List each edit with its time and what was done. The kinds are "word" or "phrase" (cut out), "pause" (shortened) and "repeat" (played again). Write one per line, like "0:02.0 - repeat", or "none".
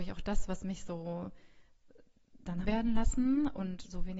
0:02.6 - phrase